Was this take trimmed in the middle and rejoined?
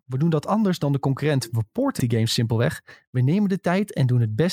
yes; 1 cut; at 2.0 s

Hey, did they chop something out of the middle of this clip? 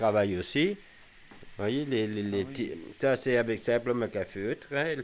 no; 0 cuts

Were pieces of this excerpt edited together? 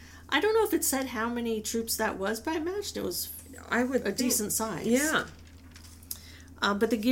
no; 0 cuts

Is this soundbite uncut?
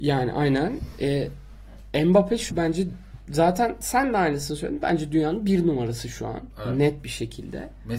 no; 1 cut; at 2.5 s

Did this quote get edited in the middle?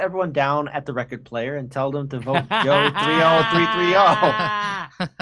no; 0 cuts

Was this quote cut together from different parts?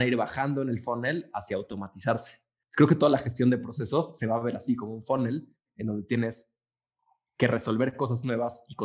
no; 0 cuts

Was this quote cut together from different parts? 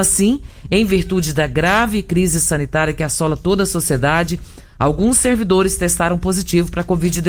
no; 0 cuts

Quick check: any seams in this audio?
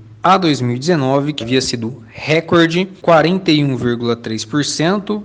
yes; 2 cuts; at 1.4 s, 3.0 s

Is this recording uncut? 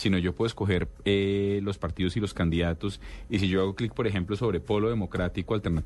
yes; 0 cuts

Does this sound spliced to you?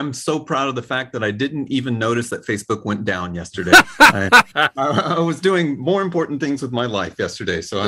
yes; 1 cut; at 4.5 s

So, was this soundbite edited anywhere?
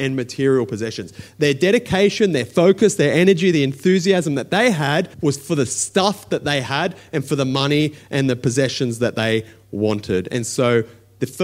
yes; 1 cut; at 5.1 s

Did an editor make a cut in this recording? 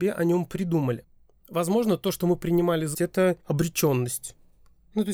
yes; 2 cuts; at 2.9 s, 3.4 s

